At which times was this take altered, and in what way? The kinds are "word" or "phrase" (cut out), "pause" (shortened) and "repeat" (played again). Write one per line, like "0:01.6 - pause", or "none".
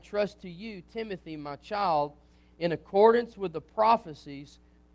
none